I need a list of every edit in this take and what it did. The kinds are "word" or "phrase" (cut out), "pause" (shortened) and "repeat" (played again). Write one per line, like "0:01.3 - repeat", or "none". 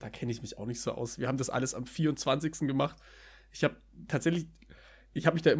none